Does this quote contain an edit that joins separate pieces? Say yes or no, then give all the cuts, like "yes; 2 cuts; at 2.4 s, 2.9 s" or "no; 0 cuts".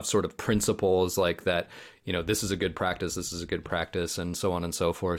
no; 0 cuts